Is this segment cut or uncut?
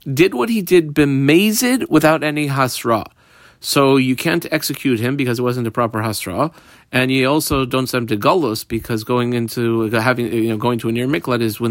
uncut